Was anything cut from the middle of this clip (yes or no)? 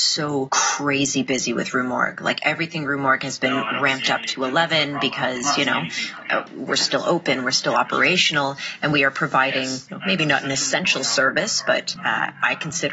yes